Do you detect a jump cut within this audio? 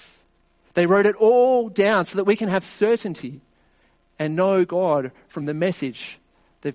no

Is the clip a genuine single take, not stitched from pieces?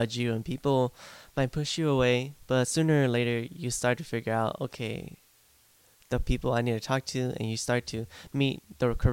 yes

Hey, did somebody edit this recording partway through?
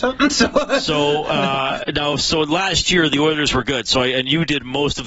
no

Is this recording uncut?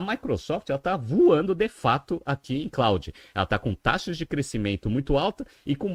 yes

